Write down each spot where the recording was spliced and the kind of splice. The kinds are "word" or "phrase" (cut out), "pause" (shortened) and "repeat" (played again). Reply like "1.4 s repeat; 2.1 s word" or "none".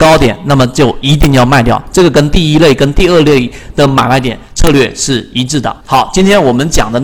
5.8 s pause